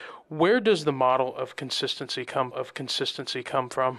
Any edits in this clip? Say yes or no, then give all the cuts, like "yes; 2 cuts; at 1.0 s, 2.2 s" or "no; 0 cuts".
yes; 1 cut; at 2.5 s